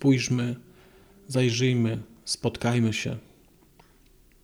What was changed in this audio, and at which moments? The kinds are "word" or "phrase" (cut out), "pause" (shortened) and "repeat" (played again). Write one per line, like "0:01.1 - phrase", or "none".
none